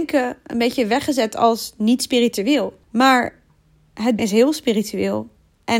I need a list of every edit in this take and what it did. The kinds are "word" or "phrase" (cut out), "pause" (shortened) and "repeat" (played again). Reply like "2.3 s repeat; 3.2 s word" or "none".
2.8 s pause; 4.2 s word